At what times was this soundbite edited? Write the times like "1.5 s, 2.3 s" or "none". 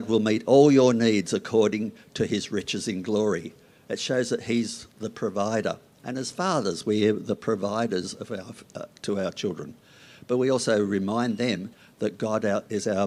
none